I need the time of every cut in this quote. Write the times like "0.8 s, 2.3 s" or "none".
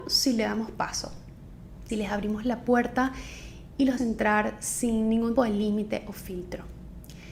1.9 s, 4.0 s, 5.4 s